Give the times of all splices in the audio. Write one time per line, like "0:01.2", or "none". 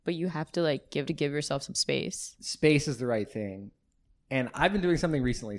0:01.0